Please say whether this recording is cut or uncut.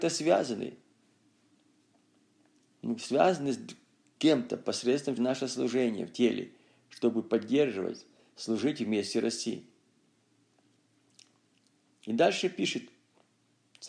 cut